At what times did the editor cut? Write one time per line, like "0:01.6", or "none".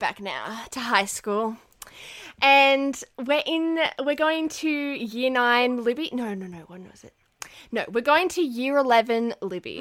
0:03.1